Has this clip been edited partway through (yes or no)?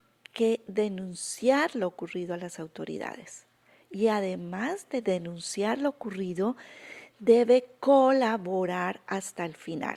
no